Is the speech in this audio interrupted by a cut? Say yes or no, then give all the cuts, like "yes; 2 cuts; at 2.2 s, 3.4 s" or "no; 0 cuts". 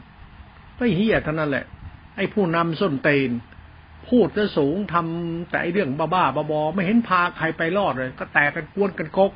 yes; 1 cut; at 2.1 s